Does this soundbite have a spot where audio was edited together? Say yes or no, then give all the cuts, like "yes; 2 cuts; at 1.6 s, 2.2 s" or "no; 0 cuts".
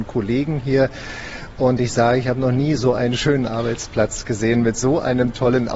no; 0 cuts